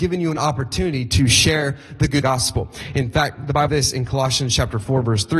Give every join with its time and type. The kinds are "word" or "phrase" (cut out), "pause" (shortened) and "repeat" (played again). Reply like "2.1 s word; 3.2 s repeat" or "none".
2.2 s phrase; 3.7 s word